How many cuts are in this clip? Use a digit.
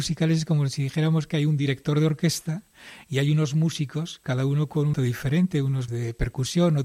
2